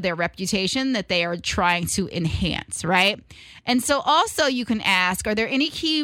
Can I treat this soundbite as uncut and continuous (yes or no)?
yes